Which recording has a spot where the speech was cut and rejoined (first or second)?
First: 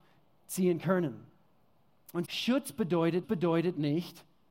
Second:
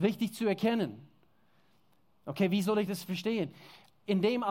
first